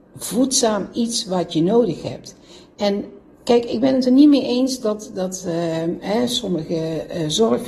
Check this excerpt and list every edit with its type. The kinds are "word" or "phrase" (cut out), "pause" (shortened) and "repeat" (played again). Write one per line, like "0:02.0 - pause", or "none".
none